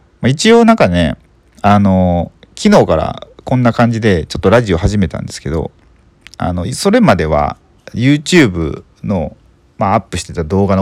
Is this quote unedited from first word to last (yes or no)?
yes